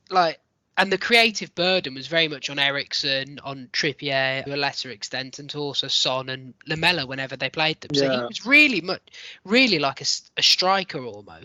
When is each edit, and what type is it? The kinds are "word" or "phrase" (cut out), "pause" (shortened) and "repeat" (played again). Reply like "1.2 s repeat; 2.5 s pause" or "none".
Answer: 4.5 s phrase